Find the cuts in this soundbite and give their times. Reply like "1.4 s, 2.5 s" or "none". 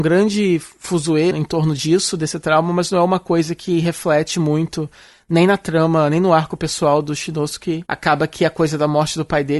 1.3 s

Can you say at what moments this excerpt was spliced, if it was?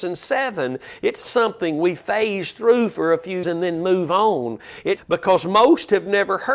1.2 s, 3.4 s, 5.0 s

